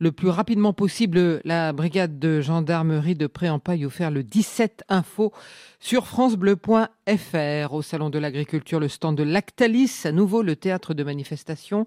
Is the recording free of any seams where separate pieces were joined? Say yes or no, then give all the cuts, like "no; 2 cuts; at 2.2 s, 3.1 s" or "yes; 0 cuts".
yes; 0 cuts